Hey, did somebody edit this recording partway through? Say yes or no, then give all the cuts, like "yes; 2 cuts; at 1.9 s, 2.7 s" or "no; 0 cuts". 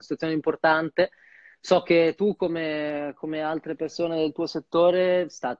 no; 0 cuts